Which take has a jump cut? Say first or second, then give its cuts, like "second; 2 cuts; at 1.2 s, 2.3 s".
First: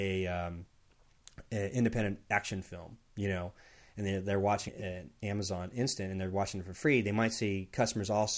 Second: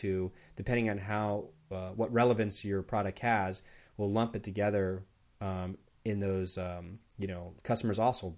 first; 1 cut; at 4.7 s